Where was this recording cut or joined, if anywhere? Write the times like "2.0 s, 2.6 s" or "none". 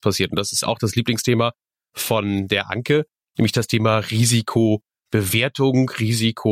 none